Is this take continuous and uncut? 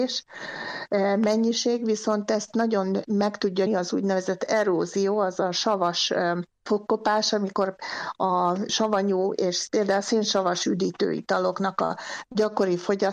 no; 1 cut; at 3.7 s

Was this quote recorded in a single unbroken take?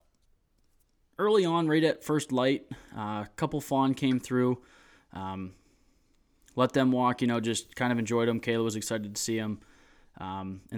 yes; 0 cuts

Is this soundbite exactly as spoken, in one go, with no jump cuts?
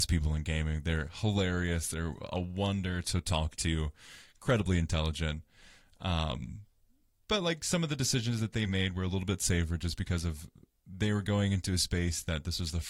yes; 0 cuts

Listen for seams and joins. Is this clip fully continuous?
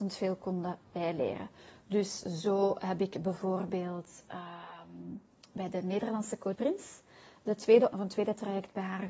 no; 2 cuts; at 6.6 s, 7.9 s

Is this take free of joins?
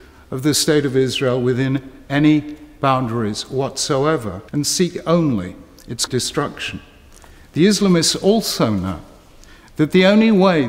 no; 2 cuts; at 4.5 s, 6.1 s

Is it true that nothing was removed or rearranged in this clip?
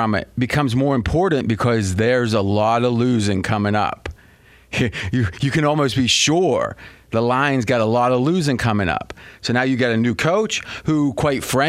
yes; 0 cuts

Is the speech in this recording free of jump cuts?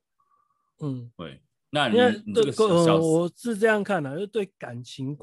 yes; 0 cuts

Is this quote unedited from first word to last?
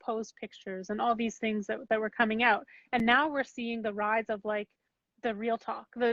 yes; 0 cuts

